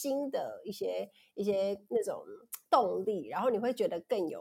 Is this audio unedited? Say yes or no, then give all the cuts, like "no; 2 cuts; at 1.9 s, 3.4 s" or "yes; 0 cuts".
yes; 0 cuts